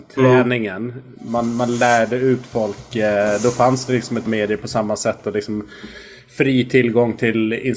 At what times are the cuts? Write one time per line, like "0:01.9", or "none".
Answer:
0:04.3